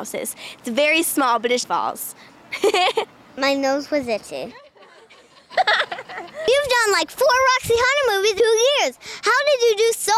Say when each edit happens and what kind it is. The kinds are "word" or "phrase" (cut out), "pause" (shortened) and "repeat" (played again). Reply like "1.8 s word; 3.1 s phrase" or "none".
1.6 s phrase; 8.4 s phrase